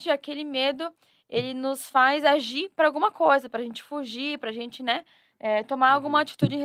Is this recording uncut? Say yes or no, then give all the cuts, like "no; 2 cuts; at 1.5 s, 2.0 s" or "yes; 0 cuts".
yes; 0 cuts